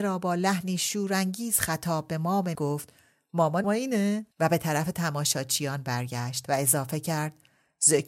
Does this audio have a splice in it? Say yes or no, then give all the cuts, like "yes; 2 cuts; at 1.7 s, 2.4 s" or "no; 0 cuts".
yes; 3 cuts; at 2.5 s, 3.6 s, 4.3 s